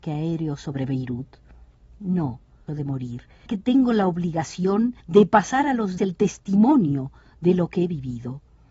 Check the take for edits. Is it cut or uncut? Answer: cut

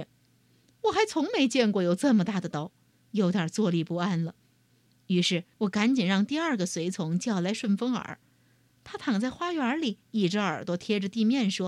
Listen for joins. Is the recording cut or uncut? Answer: cut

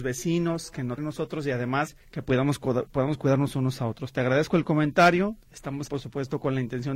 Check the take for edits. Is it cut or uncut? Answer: cut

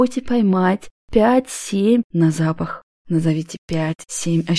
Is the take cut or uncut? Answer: cut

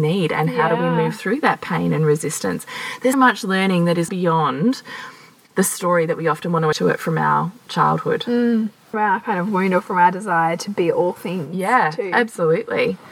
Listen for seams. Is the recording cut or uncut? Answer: cut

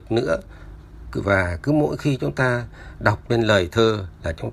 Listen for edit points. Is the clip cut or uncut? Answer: uncut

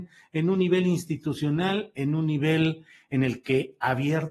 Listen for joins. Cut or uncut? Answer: uncut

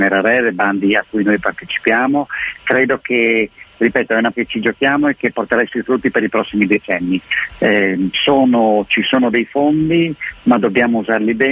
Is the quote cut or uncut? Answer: cut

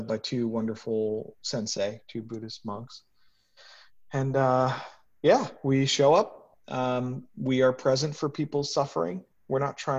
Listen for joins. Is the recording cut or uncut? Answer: uncut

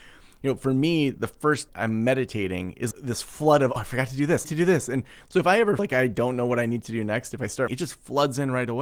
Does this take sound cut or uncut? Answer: cut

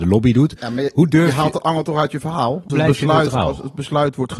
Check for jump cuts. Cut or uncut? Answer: cut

